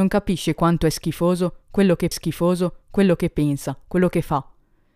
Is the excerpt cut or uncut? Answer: cut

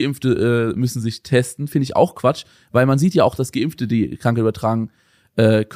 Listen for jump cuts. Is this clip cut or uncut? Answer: uncut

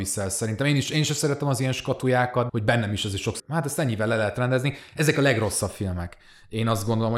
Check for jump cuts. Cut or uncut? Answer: cut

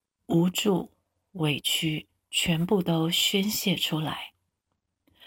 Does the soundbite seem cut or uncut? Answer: uncut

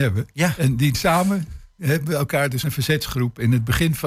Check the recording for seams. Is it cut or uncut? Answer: cut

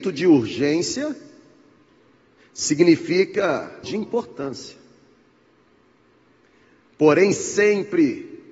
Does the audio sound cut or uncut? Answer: cut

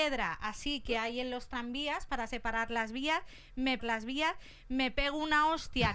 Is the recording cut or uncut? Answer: cut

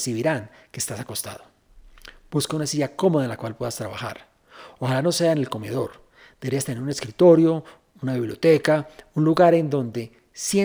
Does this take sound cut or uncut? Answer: uncut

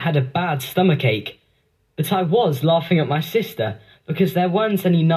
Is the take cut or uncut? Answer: uncut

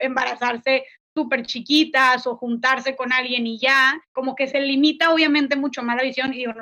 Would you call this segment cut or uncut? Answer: cut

